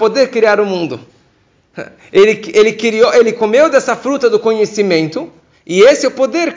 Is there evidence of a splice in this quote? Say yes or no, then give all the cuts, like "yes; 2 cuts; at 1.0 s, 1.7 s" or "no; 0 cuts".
no; 0 cuts